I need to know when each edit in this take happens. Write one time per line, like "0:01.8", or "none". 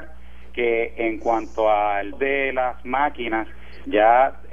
0:02.1